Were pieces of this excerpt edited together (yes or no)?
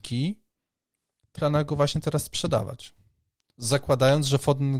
yes